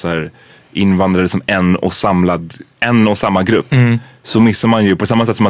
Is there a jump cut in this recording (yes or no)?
no